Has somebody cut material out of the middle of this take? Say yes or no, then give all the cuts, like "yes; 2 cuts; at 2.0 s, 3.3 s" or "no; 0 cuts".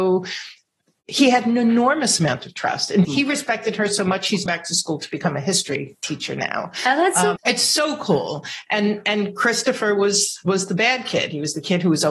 yes; 3 cuts; at 3.0 s, 4.5 s, 7.4 s